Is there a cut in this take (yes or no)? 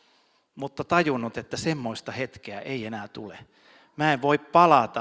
no